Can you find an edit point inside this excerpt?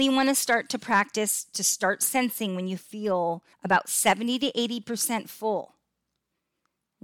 yes; 1 cut; at 3.5 s

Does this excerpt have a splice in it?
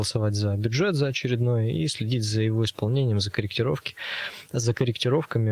no; 0 cuts

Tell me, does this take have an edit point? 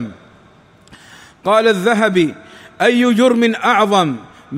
no; 0 cuts

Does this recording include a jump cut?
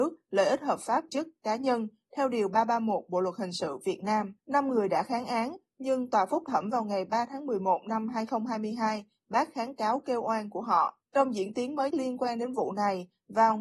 yes; 4 cuts; at 1.1 s, 4.4 s, 11.0 s, 11.9 s

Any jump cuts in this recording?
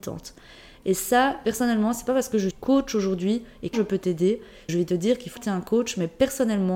yes; 4 cuts; at 2.5 s, 3.7 s, 4.7 s, 5.4 s

